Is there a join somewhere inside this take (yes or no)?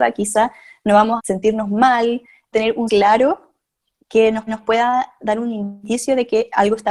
yes